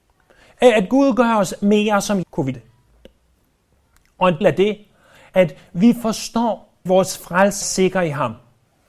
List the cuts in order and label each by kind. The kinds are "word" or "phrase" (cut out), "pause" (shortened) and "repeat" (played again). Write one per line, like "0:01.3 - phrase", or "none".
0:02.2 - word
0:02.5 - word
0:04.4 - word
0:05.3 - word
0:06.9 - word
0:07.6 - word